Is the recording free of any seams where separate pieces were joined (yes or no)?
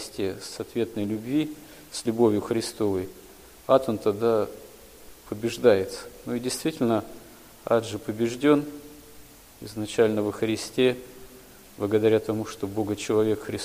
yes